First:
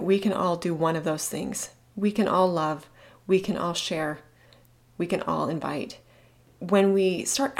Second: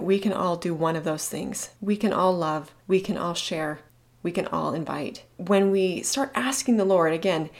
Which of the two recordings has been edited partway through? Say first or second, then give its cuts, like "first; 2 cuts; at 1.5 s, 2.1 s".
second; 4 cuts; at 1.8 s, 2.8 s, 3.9 s, 5.3 s